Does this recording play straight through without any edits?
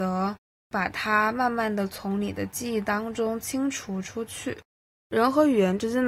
yes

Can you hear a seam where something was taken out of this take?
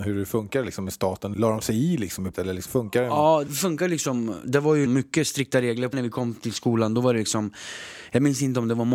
yes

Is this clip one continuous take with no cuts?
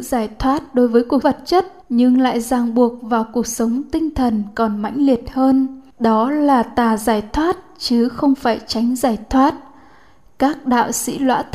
no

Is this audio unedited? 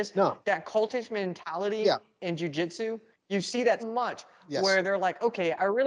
no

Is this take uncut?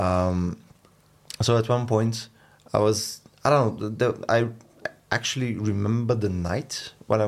yes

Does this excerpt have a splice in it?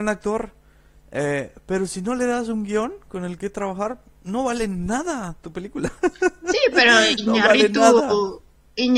no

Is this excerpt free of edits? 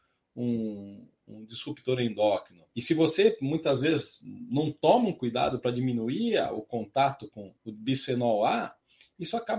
no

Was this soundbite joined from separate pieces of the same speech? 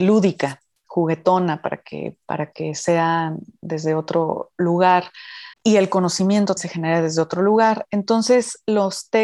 yes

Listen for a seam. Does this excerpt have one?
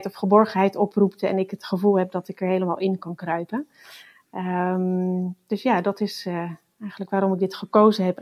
no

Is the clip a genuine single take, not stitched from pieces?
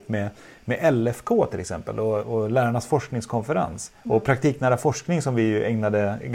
no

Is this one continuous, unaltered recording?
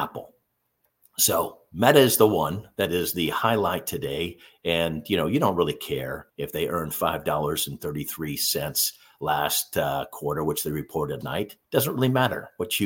no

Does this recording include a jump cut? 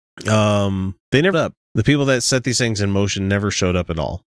yes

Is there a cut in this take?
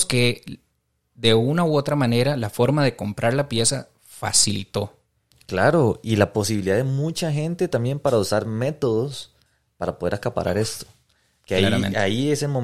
no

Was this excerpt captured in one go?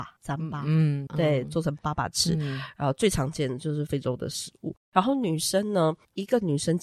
no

